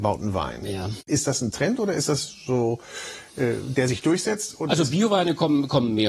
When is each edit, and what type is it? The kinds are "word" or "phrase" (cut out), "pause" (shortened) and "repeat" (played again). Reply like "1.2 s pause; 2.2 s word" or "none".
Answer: none